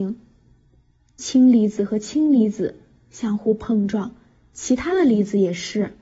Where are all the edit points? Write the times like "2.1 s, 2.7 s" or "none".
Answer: none